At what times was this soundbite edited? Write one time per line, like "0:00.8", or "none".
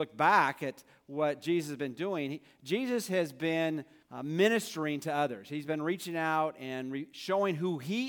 0:04.0